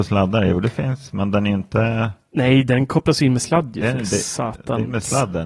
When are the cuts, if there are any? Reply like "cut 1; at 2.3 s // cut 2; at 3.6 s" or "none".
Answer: none